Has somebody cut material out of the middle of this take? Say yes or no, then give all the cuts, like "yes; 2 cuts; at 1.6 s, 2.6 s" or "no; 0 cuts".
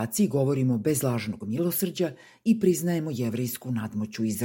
no; 0 cuts